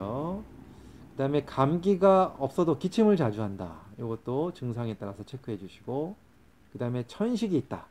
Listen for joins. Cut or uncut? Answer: uncut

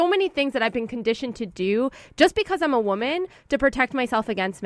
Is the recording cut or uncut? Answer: uncut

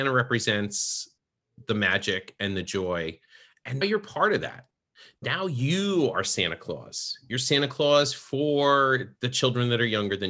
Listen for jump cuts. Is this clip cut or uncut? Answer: cut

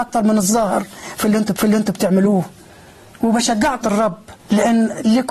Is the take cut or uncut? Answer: cut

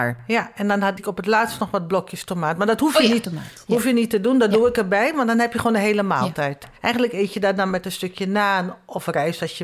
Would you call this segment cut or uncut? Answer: cut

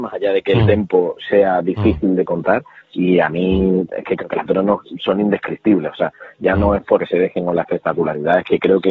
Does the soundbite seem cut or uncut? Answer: cut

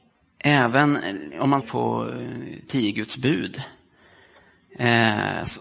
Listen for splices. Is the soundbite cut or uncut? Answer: cut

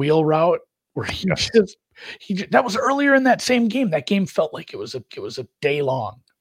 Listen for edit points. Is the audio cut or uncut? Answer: cut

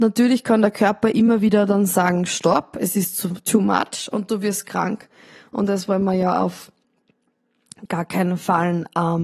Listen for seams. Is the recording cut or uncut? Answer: uncut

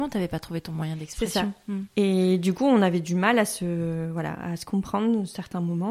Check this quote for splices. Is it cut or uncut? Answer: uncut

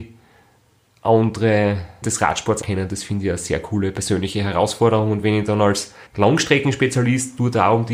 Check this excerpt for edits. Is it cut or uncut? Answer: cut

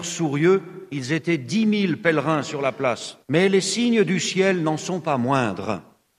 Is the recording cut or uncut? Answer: cut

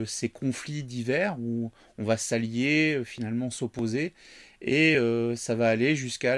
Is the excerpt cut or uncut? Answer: uncut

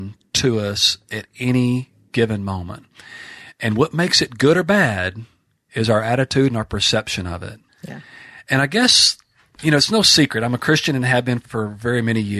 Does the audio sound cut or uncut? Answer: uncut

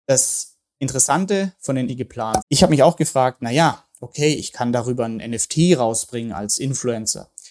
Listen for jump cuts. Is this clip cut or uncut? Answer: cut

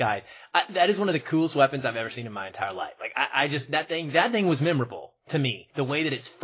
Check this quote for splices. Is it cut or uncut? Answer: uncut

